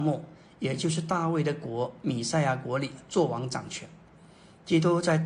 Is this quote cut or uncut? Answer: uncut